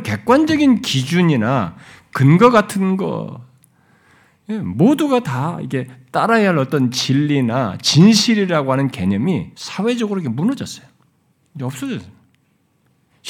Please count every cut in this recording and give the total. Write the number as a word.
one